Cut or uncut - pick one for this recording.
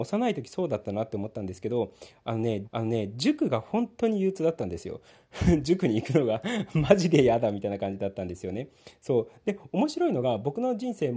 cut